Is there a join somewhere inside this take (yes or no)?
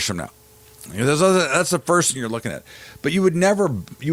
no